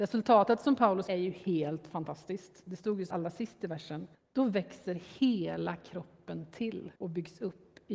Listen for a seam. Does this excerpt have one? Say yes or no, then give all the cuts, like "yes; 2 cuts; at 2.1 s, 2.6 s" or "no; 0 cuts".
yes; 4 cuts; at 1.1 s, 3.1 s, 4.1 s, 7.0 s